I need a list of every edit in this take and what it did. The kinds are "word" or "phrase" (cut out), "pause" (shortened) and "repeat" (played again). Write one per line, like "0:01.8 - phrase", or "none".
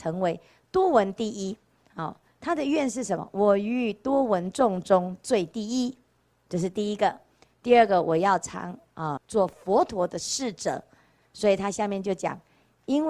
0:09.2 - word